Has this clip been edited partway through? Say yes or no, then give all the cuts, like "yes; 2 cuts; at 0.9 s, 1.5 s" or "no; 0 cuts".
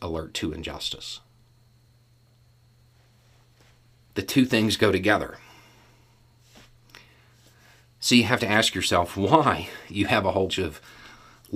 yes; 1 cut; at 10.5 s